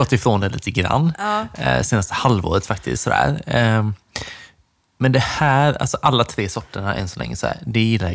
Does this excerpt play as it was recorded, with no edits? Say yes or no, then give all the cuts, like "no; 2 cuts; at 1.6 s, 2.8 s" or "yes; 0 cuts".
yes; 0 cuts